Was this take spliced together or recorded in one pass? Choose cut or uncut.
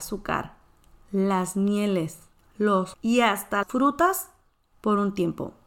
cut